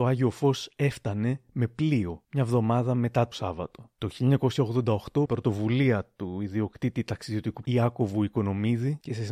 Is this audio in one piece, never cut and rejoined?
no; 3 cuts; at 3.3 s, 5.3 s, 7.6 s

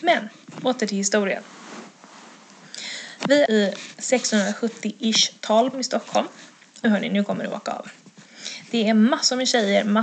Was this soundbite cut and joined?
yes; 3 cuts; at 3.5 s, 5.7 s, 6.8 s

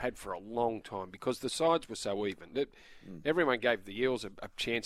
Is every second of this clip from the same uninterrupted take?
yes; 0 cuts

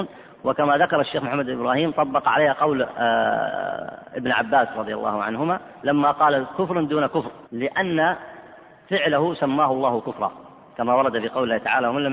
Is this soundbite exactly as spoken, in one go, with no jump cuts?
no; 1 cut; at 7.5 s

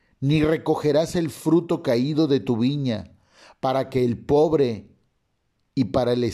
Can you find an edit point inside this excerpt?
no; 0 cuts

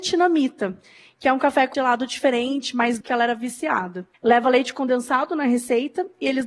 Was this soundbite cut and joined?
yes; 3 cuts; at 1.7 s, 3.0 s, 4.1 s

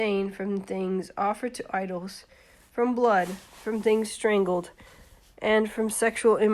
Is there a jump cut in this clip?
no; 0 cuts

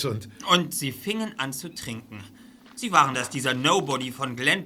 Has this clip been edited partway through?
yes; 1 cut; at 3.1 s

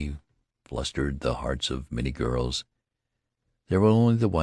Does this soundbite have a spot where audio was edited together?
no; 0 cuts

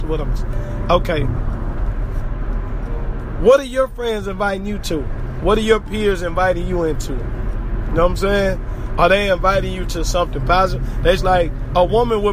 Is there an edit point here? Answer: yes; 1 cut; at 11.2 s

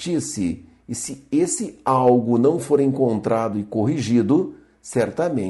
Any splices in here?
no; 0 cuts

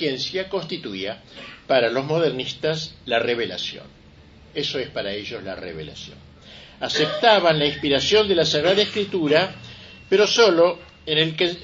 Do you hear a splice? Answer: no; 0 cuts

